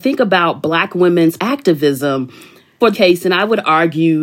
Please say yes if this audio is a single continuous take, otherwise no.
no